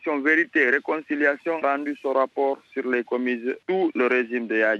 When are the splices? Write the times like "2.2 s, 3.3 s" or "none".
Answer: 1.6 s, 3.1 s, 3.6 s